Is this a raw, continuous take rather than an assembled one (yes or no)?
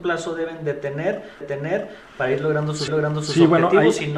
no